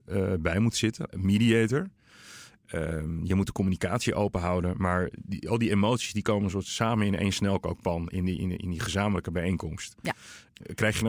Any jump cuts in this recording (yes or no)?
no